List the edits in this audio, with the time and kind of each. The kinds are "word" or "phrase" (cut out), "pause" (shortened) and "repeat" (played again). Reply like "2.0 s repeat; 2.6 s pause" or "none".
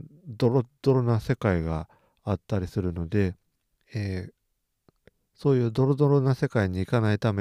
none